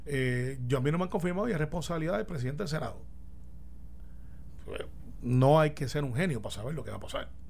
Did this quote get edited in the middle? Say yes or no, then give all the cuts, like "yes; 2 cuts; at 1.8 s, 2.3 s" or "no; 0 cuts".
no; 0 cuts